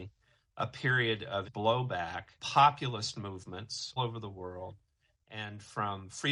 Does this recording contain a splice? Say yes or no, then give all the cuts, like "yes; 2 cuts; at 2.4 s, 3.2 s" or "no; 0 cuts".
yes; 3 cuts; at 1.4 s, 2.4 s, 4.0 s